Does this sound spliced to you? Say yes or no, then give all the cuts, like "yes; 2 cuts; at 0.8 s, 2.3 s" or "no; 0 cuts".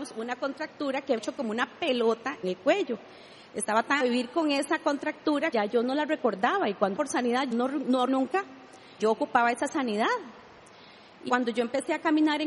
yes; 9 cuts; at 1.2 s, 2.4 s, 4.0 s, 5.5 s, 6.9 s, 7.5 s, 8.1 s, 9.0 s, 11.3 s